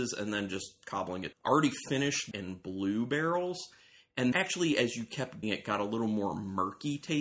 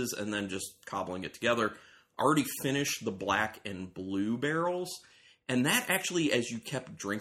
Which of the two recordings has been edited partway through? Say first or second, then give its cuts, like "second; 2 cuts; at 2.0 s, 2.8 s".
first; 4 cuts; at 1.3 s, 2.3 s, 4.3 s, 5.4 s